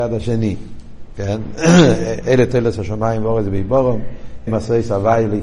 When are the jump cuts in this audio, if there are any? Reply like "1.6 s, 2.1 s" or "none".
4.5 s